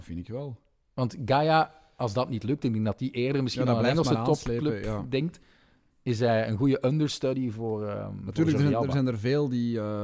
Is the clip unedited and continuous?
yes; 0 cuts

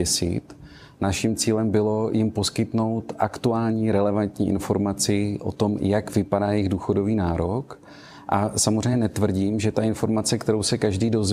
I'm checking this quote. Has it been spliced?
no; 0 cuts

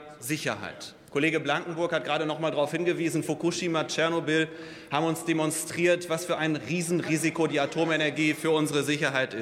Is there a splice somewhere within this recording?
no; 0 cuts

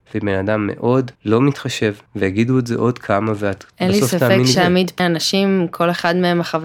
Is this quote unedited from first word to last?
no; 4 cuts; at 1.1 s, 2.1 s, 4.5 s, 5.0 s

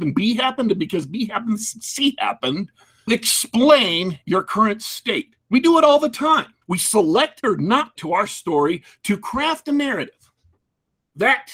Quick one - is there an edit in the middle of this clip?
yes; 4 cuts; at 3.1 s, 6.6 s, 7.4 s, 8.0 s

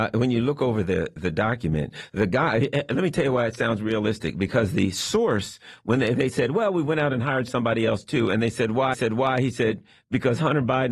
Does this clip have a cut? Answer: yes; 1 cut; at 8.9 s

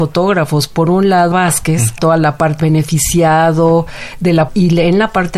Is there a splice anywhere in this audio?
yes; 4 cuts; at 1.3 s, 2.0 s, 2.6 s, 4.5 s

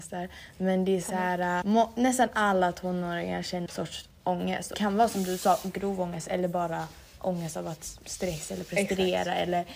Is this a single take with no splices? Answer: no; 4 cuts; at 1.6 s, 3.7 s, 4.7 s, 8.0 s

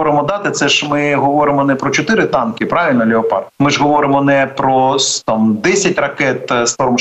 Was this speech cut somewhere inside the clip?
yes; 1 cut; at 3.5 s

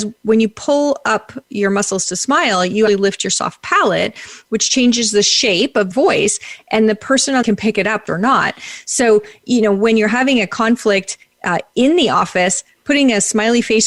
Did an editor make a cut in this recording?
yes; 4 cuts; at 2.9 s, 5.9 s, 7.4 s, 8.1 s

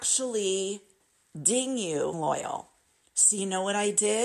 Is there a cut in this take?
yes; 1 cut; at 2.1 s

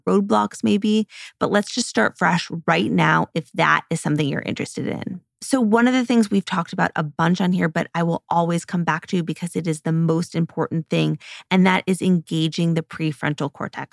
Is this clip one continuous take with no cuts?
yes; 0 cuts

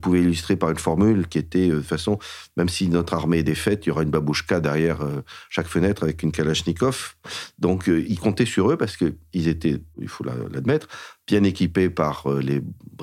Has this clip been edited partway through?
no; 0 cuts

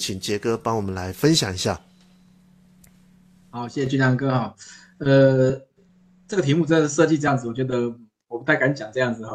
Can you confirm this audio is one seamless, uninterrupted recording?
yes; 0 cuts

